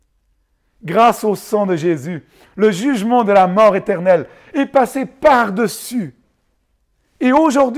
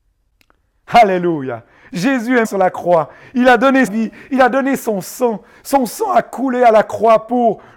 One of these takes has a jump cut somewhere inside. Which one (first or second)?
second